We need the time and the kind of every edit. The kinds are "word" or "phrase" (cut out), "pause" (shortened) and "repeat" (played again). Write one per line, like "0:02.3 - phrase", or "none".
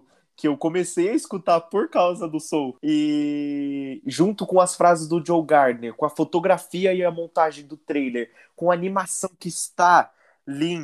none